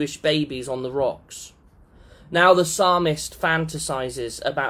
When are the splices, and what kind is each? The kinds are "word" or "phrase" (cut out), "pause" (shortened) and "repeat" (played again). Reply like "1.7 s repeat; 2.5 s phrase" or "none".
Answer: none